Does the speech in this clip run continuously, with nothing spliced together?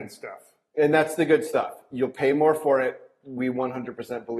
yes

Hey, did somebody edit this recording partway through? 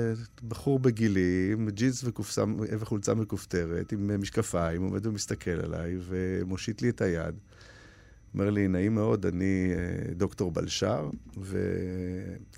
no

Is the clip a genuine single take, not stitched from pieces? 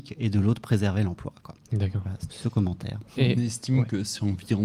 no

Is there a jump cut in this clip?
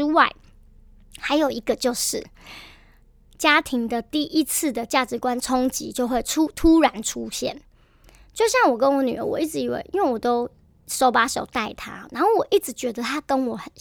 no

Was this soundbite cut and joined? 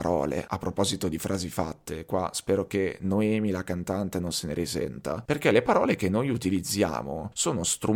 no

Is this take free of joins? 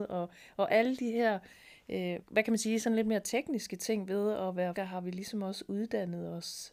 no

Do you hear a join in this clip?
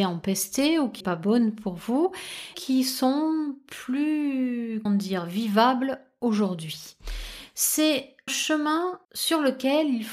yes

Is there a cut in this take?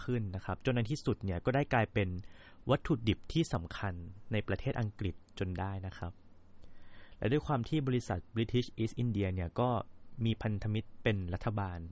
no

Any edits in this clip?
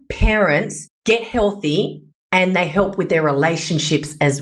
no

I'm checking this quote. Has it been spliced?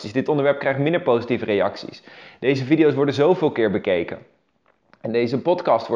no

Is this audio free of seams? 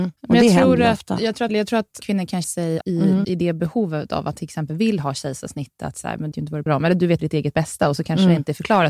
no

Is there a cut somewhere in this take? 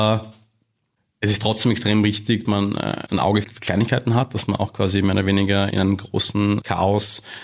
yes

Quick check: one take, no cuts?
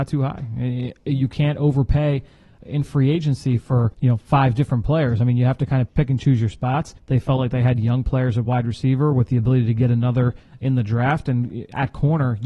yes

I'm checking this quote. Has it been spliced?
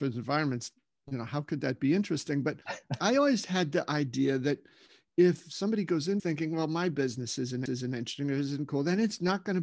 yes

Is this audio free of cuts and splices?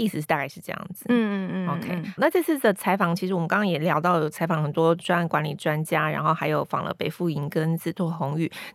no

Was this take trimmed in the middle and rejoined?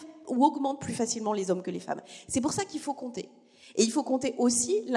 no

